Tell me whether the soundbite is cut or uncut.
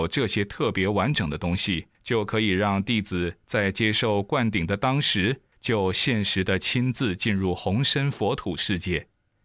cut